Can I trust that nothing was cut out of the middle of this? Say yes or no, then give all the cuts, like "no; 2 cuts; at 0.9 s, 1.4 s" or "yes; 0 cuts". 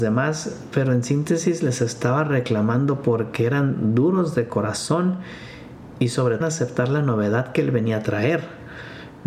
no; 1 cut; at 6.4 s